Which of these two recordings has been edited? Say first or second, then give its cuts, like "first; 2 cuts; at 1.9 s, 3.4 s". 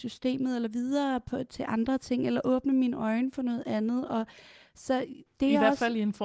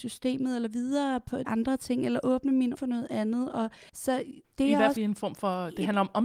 second; 4 cuts; at 1.4 s, 2.7 s, 3.9 s, 5.0 s